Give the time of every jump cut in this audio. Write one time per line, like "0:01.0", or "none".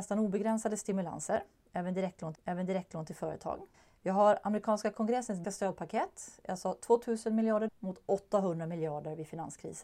0:02.3
0:03.7
0:05.4
0:07.7

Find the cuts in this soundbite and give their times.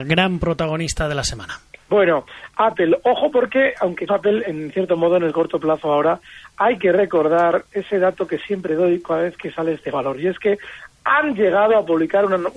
0:01.7
0:04.1

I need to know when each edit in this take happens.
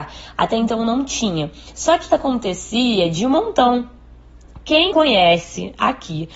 0:02.1
0:04.9

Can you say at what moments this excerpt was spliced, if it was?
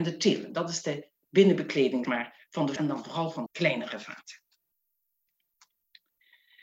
0:02.0
0:02.8
0:03.5

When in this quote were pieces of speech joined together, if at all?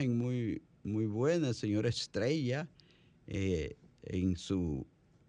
none

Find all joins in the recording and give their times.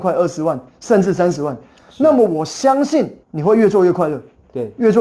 0:03.2

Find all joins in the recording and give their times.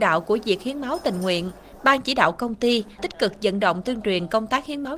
0:03.0

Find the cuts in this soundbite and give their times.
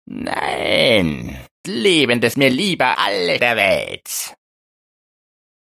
0:01.6
0:02.3
0:02.9
0:03.4

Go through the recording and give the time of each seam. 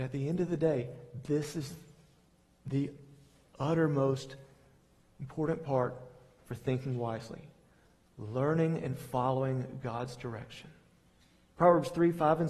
none

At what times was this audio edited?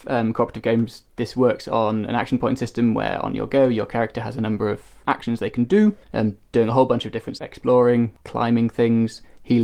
0:05.0
0:06.0
0:07.4

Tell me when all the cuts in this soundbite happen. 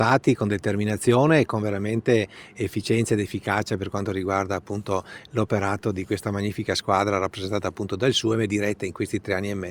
none

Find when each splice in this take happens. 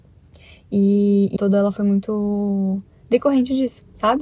0:01.4

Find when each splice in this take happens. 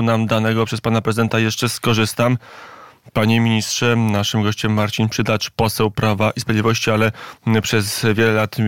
none

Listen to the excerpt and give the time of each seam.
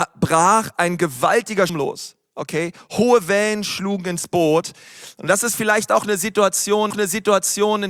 0:01.7
0:06.9

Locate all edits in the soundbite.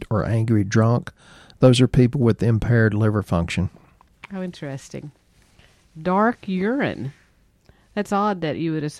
none

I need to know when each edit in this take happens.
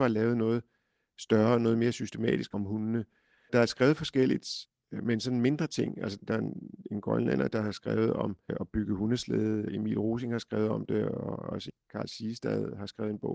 none

